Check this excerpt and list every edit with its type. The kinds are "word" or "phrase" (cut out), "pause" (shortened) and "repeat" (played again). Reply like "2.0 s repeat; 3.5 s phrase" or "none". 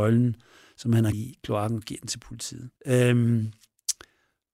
1.1 s word; 2.8 s pause